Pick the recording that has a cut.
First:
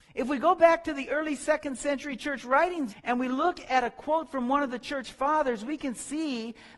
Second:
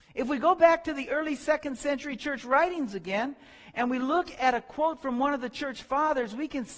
first; 1 cut; at 2.9 s

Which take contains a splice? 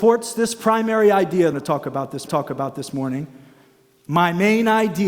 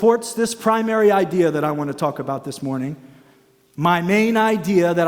first; 2 cuts; at 1.5 s, 2.3 s

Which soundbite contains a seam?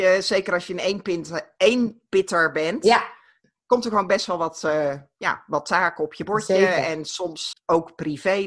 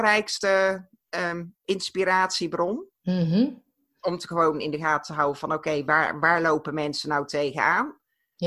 first; 1 cut; at 7.5 s

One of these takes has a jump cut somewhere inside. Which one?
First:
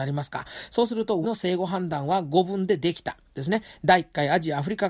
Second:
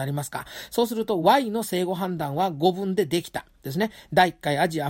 first; 1 cut; at 1.2 s

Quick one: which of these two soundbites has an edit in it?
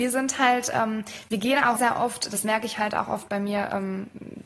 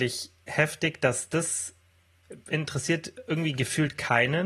first; 1 cut; at 1.8 s

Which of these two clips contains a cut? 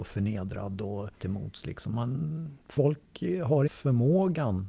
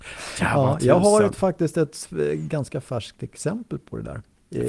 first; 3 cuts; at 1.1 s, 2.6 s, 3.7 s

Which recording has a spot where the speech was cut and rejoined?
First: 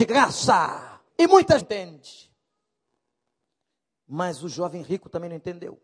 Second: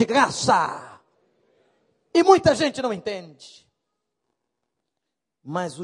first; 2 cuts; at 1.1 s, 1.6 s

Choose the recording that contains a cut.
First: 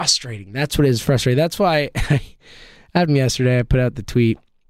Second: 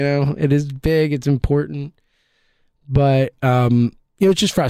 first; 1 cut; at 3.1 s

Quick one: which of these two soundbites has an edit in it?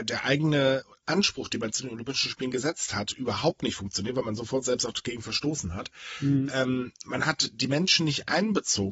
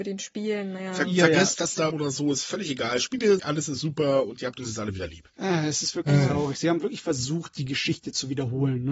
second; 3 cuts; at 1.9 s, 3.4 s, 5.3 s

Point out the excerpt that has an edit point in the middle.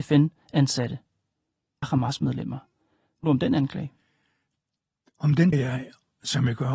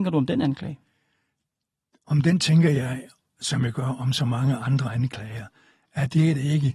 first; 3 cuts; at 1.8 s, 3.2 s, 5.5 s

